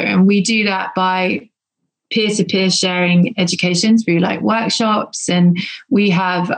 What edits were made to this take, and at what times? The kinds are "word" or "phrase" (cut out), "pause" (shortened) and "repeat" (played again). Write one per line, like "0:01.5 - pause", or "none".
none